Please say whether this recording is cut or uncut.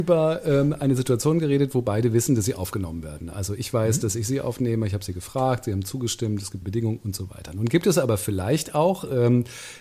cut